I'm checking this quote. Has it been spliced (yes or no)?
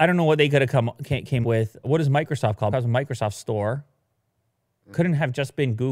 yes